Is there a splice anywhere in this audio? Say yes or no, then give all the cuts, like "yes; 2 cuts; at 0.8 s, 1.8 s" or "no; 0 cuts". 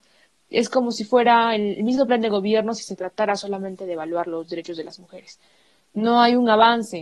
no; 0 cuts